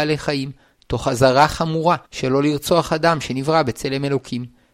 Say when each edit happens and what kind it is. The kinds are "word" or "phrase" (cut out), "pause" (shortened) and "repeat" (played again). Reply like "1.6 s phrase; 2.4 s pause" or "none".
2.0 s pause